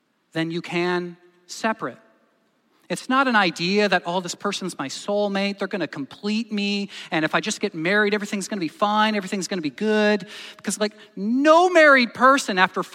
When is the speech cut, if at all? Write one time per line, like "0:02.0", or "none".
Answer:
none